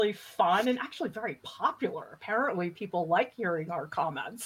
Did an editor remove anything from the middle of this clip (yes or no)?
no